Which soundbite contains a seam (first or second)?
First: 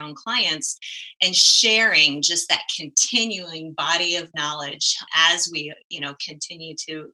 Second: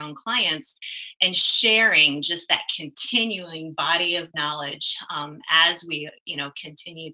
first